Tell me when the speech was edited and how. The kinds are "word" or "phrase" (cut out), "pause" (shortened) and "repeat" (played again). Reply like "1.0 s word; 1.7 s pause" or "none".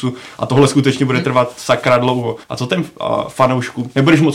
2.4 s pause